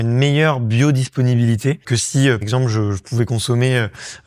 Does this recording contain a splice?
yes; 1 cut; at 2.4 s

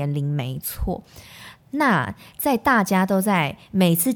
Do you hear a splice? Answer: no; 0 cuts

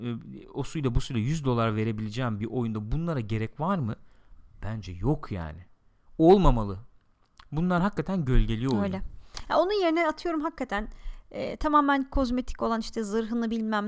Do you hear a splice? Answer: no; 0 cuts

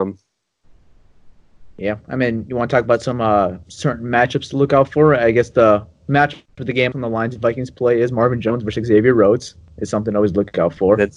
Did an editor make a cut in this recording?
yes; 3 cuts; at 1.7 s, 3.6 s, 6.9 s

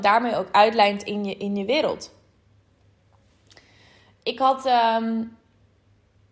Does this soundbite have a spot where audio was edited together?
no; 0 cuts

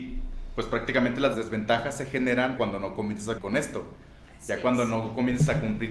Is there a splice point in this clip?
yes; 3 cuts; at 1.3 s, 2.6 s, 3.4 s

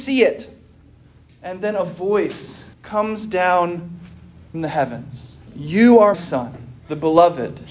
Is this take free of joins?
no; 5 cuts; at 2.7 s, 4.5 s, 5.5 s, 6.1 s, 6.8 s

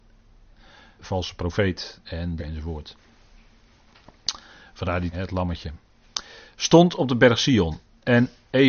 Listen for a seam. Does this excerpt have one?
yes; 3 cuts; at 1.0 s, 2.4 s, 5.1 s

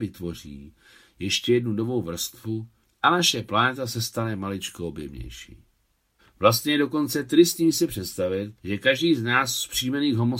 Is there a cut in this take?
yes; 3 cuts; at 2.8 s, 6.2 s, 8.6 s

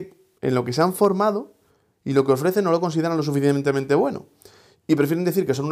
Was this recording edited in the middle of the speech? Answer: no; 0 cuts

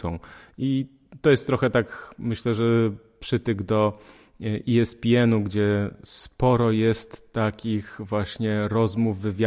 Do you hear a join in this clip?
no; 0 cuts

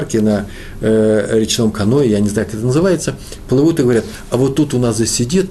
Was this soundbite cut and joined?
no; 0 cuts

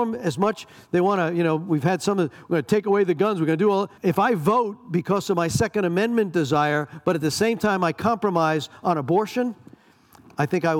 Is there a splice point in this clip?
yes; 1 cut; at 4.0 s

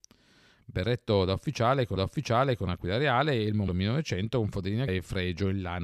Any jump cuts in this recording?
yes; 3 cuts; at 2.0 s, 3.7 s, 4.9 s

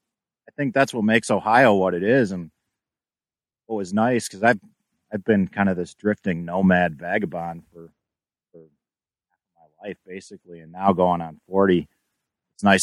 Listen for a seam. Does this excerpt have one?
no; 0 cuts

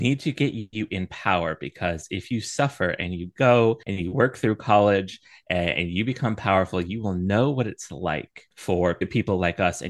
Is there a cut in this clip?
yes; 2 cuts; at 3.8 s, 8.5 s

